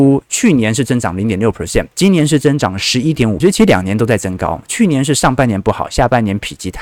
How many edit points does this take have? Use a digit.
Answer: 2